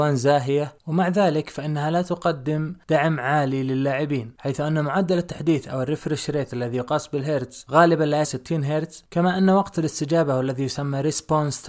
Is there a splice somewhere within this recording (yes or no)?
yes